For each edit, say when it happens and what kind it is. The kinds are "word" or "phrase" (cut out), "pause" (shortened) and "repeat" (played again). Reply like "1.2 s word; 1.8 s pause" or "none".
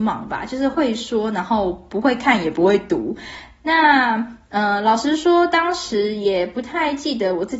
none